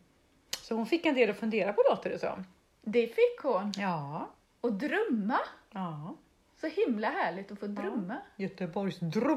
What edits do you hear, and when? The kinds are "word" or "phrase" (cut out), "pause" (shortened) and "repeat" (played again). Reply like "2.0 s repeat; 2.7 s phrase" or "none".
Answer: none